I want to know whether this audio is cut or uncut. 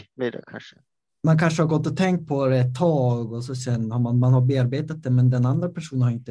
uncut